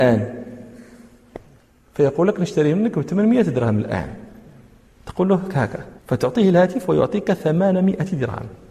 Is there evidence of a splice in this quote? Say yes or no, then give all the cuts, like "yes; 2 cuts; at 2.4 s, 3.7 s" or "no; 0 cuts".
yes; 1 cut; at 6.0 s